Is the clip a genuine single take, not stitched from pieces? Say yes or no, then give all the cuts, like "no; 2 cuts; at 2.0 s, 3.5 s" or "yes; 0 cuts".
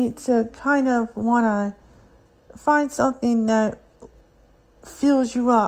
yes; 0 cuts